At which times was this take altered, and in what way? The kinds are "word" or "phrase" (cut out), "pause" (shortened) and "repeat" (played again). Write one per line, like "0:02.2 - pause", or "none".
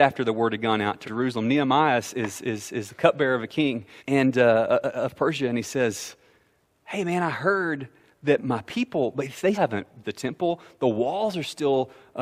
0:01.0 - word
0:02.4 - word
0:04.0 - word
0:08.4 - word
0:09.5 - word
0:10.0 - word